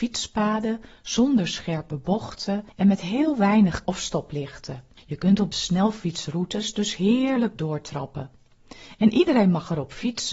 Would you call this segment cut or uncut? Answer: cut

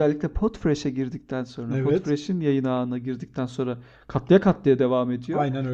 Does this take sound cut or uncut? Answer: uncut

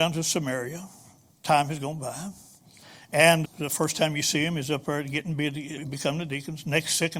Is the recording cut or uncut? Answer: cut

